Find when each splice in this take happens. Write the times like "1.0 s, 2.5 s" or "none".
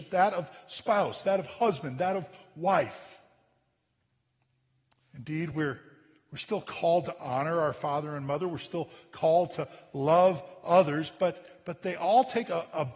none